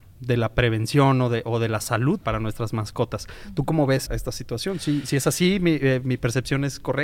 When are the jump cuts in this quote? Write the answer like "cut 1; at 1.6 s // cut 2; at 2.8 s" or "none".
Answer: cut 1; at 2.2 s // cut 2; at 4.1 s